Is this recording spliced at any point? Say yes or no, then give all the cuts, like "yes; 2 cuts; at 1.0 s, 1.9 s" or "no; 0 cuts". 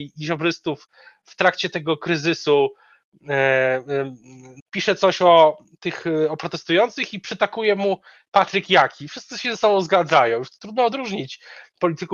yes; 1 cut; at 4.6 s